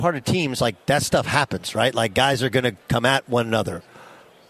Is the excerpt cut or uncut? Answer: uncut